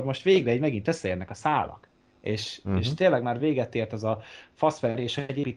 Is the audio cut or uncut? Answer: uncut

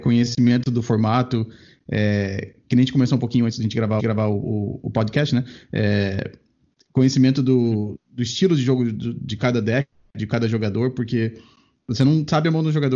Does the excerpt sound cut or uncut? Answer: cut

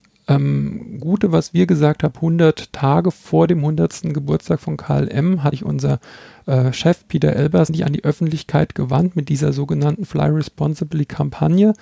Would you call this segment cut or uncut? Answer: uncut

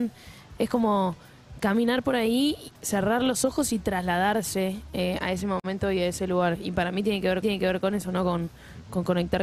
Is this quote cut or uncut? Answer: cut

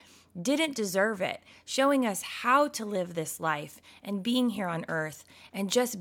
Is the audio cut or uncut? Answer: uncut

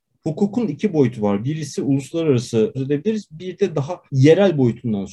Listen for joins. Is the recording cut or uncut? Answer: cut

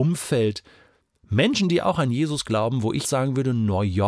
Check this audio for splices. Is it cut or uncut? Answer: cut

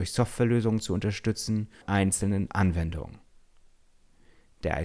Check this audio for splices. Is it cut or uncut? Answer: cut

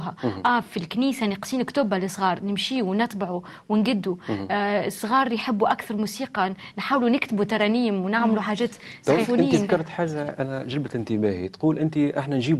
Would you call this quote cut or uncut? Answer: uncut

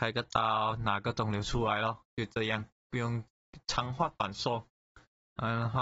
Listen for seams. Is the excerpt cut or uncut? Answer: cut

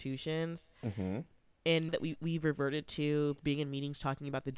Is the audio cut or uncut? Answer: cut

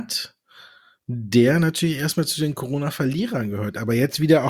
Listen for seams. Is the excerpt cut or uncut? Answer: uncut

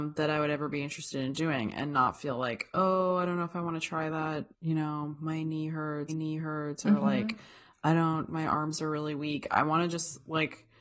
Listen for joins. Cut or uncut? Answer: cut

